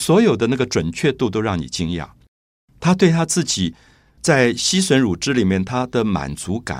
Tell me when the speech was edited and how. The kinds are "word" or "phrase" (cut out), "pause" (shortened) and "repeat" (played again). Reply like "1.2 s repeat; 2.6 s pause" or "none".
none